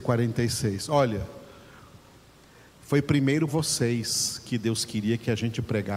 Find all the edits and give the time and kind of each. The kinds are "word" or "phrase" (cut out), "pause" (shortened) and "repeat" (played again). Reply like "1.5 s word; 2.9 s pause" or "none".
3.5 s word